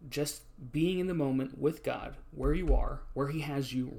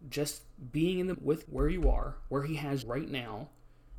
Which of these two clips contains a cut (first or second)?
second